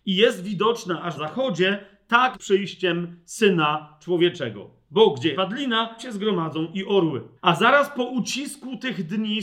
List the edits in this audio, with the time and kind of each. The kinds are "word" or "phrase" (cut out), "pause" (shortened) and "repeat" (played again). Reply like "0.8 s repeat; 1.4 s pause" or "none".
1.1 s word; 2.3 s phrase; 5.3 s word; 6.0 s word; 7.4 s pause